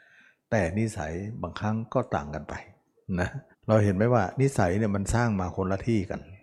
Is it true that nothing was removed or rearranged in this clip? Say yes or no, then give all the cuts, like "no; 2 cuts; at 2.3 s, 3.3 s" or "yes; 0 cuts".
no; 1 cut; at 3.5 s